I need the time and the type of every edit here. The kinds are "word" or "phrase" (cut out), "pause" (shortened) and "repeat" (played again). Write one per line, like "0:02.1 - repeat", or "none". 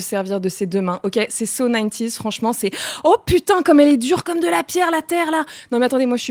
none